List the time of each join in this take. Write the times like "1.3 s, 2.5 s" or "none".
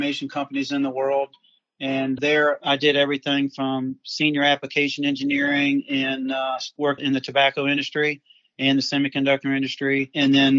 none